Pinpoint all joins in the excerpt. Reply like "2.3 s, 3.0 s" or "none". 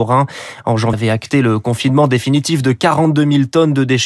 0.9 s